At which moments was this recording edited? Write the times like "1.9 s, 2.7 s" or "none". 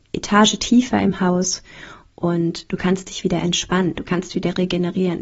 none